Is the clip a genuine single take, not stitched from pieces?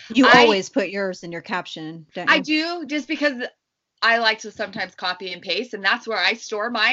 yes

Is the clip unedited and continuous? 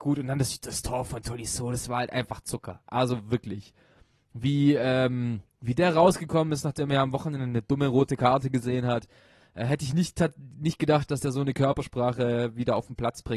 yes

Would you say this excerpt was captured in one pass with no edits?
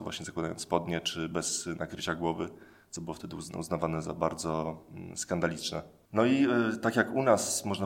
yes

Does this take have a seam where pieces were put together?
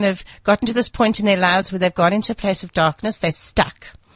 no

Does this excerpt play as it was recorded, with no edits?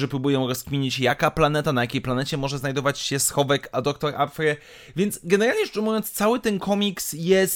yes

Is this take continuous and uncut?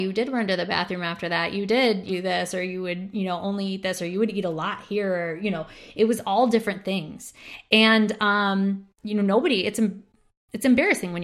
no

